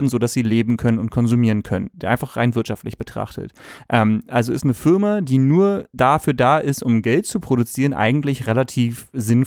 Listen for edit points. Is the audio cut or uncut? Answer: uncut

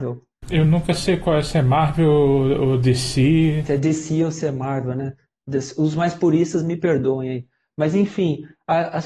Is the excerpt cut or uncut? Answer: uncut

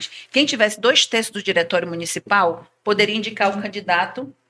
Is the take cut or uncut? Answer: uncut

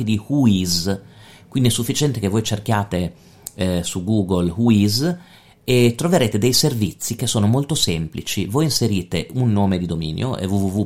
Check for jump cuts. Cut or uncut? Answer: uncut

